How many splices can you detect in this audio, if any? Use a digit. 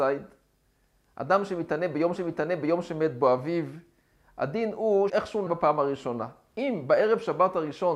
3